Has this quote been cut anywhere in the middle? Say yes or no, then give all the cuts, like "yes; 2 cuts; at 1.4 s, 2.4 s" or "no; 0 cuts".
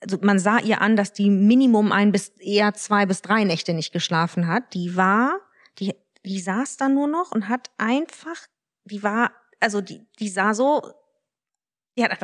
no; 0 cuts